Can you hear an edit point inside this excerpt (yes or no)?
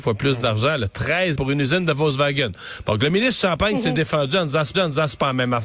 yes